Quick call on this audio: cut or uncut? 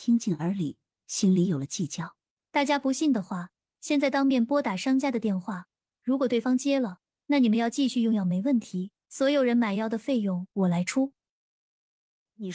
cut